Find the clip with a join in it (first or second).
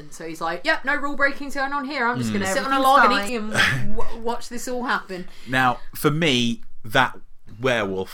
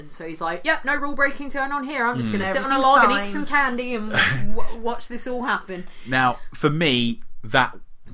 first